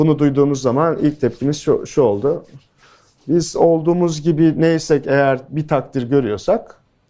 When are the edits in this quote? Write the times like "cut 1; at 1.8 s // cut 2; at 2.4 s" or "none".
none